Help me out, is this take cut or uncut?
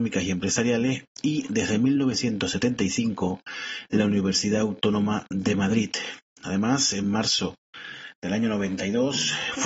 uncut